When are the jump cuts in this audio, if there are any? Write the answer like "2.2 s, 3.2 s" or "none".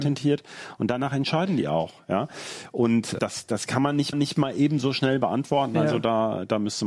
3.2 s, 4.1 s